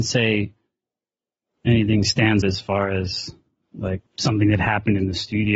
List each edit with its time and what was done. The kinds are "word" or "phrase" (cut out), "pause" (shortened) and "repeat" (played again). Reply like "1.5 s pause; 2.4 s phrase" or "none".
2.4 s word; 4.1 s pause